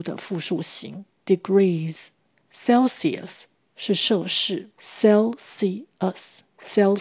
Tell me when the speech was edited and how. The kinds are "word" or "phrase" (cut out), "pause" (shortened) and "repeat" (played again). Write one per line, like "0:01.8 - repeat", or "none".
0:01.1 - word